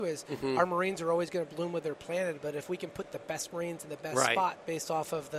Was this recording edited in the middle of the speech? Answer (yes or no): no